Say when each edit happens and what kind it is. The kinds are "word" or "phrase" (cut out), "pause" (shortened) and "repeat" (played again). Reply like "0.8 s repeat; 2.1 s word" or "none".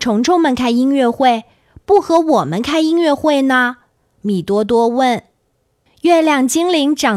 none